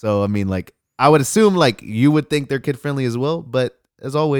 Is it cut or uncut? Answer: uncut